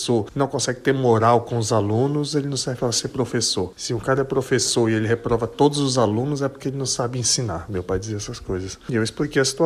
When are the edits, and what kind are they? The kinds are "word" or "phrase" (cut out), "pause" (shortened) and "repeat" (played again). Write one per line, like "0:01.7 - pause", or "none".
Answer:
none